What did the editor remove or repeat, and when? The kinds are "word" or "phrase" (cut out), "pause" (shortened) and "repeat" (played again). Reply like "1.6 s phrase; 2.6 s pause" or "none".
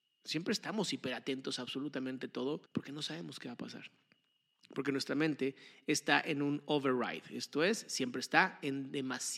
2.7 s pause